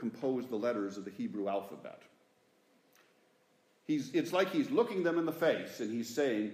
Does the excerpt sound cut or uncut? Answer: uncut